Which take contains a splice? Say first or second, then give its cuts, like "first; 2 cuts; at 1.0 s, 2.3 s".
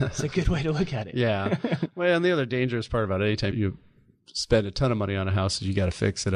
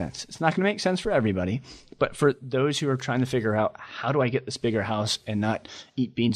first; 1 cut; at 3.5 s